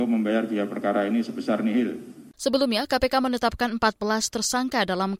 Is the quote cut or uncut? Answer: cut